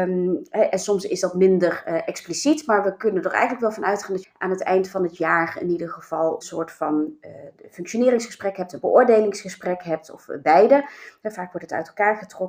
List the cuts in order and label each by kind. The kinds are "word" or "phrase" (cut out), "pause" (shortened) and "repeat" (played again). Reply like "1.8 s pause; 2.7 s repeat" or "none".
4.2 s phrase; 6.4 s word